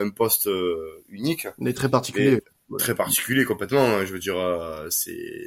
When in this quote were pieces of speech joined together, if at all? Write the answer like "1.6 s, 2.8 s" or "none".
none